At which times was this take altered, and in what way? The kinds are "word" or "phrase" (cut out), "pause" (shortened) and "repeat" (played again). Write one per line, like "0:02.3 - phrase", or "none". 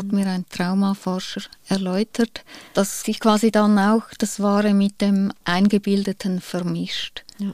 0:02.7 - pause